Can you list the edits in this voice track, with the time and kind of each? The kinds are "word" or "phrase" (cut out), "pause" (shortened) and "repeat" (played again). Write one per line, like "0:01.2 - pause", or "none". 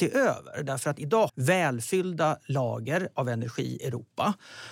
0:01.3 - phrase
0:03.8 - word